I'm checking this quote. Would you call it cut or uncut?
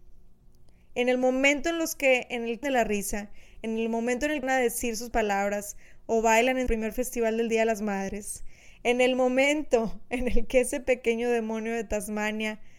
cut